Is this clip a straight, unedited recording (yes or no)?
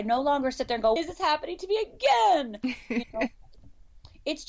no